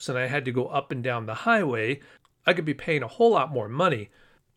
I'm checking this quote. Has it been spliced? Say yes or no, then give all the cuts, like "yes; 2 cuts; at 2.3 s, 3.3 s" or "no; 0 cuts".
no; 0 cuts